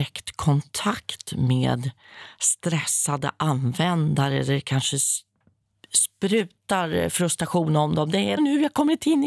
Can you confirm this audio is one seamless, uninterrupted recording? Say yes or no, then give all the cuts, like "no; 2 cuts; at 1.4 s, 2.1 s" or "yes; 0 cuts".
no; 1 cut; at 8.4 s